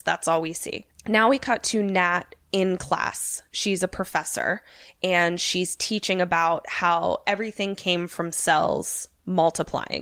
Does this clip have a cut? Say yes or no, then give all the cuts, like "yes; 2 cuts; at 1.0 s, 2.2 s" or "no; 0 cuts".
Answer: no; 0 cuts